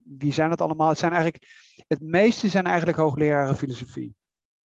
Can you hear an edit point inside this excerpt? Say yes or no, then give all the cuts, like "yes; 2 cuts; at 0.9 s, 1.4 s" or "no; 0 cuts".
no; 0 cuts